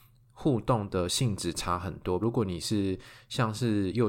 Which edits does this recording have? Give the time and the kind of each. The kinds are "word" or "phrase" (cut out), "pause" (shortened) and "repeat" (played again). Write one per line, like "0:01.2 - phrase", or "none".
0:02.2 - phrase